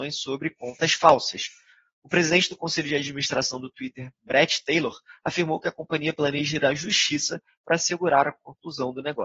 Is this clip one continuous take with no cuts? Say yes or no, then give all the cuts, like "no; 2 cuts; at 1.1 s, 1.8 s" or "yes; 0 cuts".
yes; 0 cuts